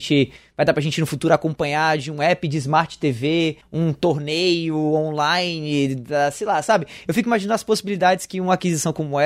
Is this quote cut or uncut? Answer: uncut